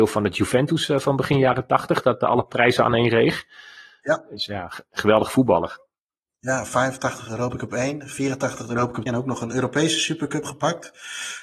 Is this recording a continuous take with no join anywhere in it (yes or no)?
no